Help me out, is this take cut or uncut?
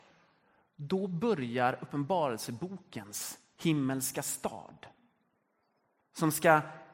uncut